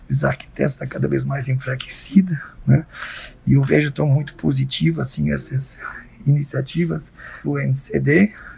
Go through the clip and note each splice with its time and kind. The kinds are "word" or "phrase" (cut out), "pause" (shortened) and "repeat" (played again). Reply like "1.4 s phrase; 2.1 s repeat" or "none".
7.4 s word